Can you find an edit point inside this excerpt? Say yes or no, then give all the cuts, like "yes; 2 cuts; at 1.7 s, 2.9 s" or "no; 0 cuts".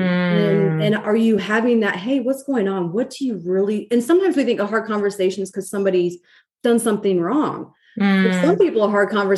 no; 0 cuts